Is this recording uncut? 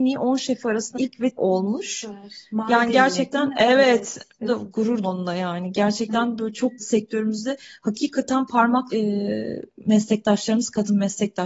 no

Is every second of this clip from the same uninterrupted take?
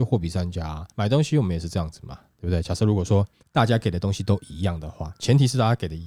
no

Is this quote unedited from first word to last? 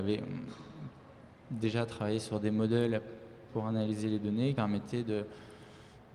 no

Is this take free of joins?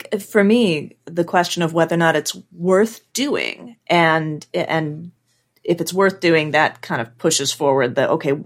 yes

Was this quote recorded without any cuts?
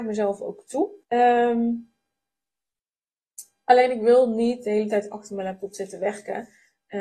no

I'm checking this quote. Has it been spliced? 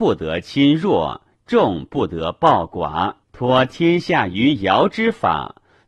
yes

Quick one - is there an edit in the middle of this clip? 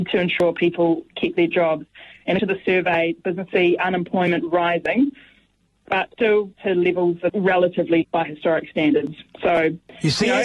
yes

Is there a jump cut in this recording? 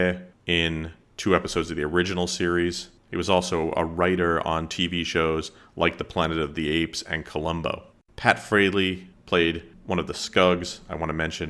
no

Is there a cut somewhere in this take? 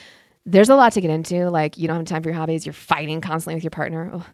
no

